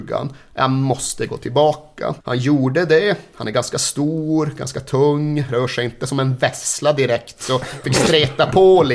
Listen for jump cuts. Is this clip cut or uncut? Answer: cut